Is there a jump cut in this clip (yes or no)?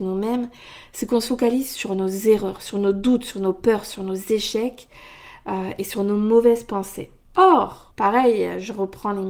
no